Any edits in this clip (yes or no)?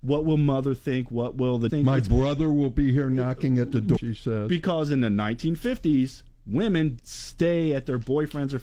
yes